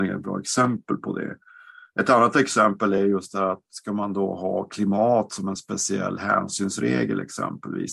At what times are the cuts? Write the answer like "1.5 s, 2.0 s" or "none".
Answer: none